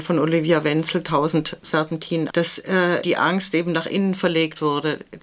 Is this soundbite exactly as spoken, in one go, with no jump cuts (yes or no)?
no